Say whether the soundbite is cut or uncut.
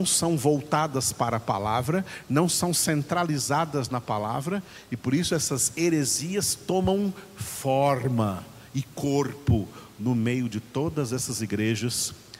uncut